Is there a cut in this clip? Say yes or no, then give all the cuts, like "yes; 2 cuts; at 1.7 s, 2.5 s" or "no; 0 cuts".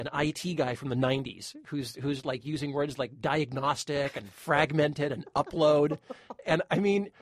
no; 0 cuts